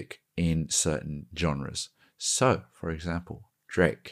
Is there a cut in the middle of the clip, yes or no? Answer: no